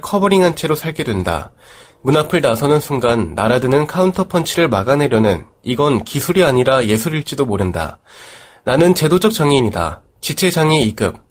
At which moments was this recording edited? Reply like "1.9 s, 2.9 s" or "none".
none